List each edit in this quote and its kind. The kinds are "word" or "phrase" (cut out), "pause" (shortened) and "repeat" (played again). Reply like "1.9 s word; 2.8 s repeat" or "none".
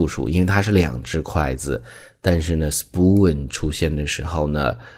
none